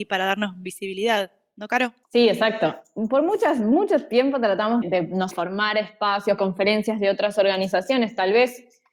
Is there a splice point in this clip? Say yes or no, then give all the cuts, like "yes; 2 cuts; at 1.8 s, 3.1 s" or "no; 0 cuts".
yes; 4 cuts; at 2.0 s, 4.8 s, 5.3 s, 6.4 s